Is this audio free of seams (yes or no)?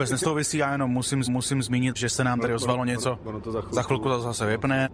no